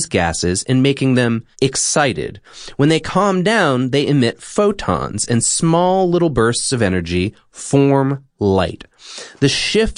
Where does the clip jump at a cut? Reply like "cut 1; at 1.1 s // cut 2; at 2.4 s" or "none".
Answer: cut 1; at 1.5 s

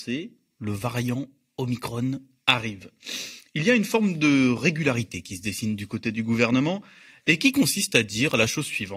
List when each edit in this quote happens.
none

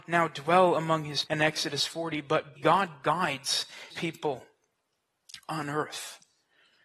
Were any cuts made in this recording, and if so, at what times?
cut 1; at 1.3 s // cut 2; at 2.6 s // cut 3; at 3.9 s

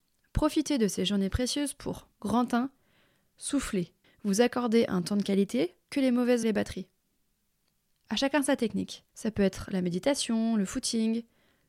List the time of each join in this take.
cut 1; at 2.1 s // cut 2; at 4.0 s // cut 3; at 5.9 s // cut 4; at 6.4 s // cut 5; at 9.1 s

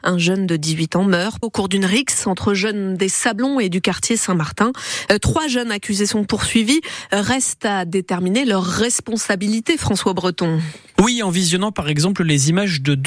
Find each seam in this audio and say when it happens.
cut 1; at 1.4 s

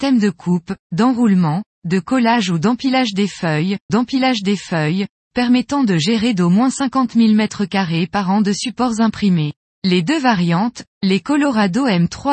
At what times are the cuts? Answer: cut 1; at 3.9 s // cut 2; at 9.7 s

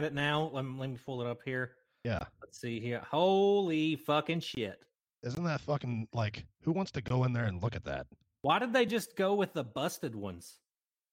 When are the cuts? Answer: none

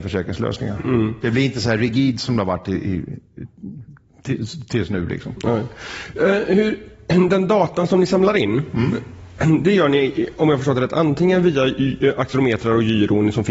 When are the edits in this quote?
none

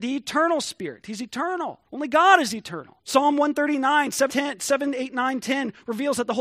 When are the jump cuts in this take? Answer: cut 1; at 1.8 s // cut 2; at 3.0 s // cut 3; at 4.3 s

